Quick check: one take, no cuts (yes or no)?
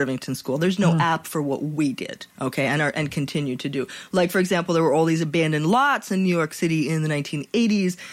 no